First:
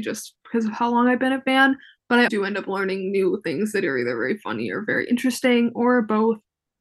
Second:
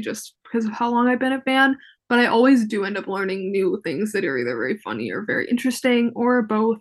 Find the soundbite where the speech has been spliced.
first; 1 cut; at 2.3 s

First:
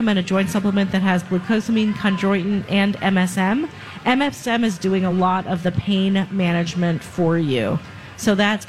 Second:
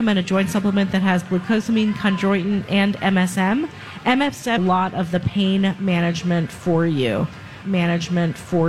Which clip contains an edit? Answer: second; 2 cuts; at 4.6 s, 7.6 s

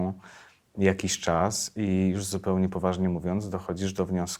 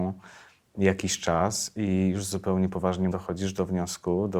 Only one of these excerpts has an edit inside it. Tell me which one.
second; 1 cut; at 3.1 s

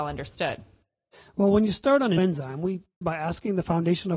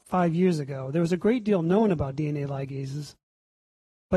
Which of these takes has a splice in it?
first; 2 cuts; at 2.2 s, 3.0 s

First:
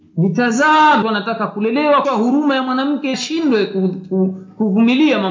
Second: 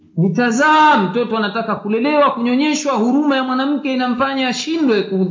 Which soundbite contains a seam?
first; 3 cuts; at 1.0 s, 2.0 s, 3.1 s

